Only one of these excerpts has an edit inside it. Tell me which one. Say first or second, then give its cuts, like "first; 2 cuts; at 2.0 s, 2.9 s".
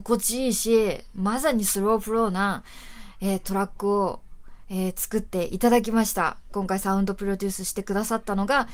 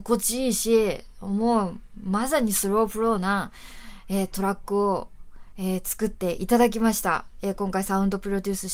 first; 2 cuts; at 1.1 s, 6.5 s